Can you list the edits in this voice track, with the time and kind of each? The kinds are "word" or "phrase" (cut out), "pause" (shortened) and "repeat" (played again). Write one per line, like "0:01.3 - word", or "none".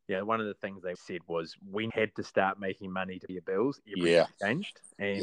0:00.9 - word
0:01.9 - word
0:03.3 - word